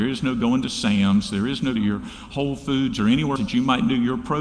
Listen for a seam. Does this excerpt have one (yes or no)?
yes